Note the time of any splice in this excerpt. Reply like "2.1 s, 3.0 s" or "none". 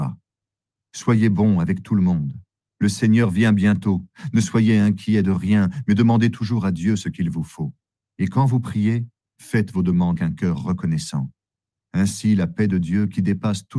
10.2 s